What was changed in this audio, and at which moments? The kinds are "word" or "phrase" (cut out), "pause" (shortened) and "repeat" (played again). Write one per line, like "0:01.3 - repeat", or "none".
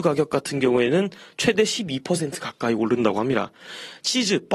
none